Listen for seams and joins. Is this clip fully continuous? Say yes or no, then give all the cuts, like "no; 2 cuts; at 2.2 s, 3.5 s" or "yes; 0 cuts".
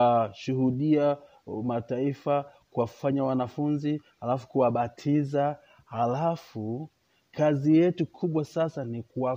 yes; 0 cuts